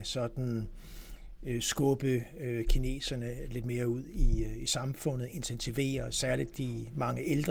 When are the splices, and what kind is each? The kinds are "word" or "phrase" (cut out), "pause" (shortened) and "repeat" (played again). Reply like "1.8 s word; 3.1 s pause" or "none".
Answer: none